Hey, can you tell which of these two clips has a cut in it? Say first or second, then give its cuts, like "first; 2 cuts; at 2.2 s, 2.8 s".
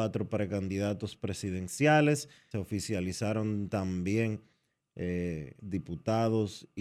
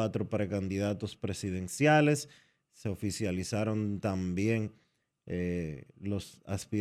first; 2 cuts; at 2.5 s, 5.6 s